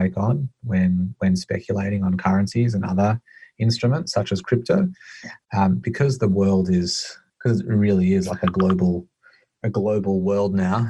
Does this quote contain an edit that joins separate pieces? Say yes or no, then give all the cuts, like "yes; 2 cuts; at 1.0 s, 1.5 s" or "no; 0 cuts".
no; 0 cuts